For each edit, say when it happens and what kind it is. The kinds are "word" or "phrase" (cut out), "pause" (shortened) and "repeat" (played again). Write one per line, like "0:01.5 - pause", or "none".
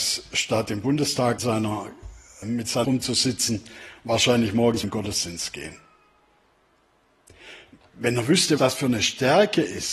0:01.4 - word
0:02.4 - word
0:02.8 - word
0:04.8 - word
0:08.6 - word